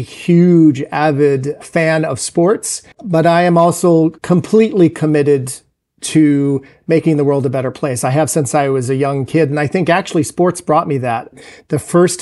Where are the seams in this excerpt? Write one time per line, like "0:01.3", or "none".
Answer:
0:02.9
0:04.2